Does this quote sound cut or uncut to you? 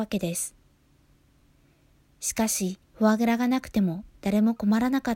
cut